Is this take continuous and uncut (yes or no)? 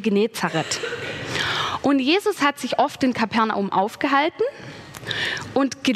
yes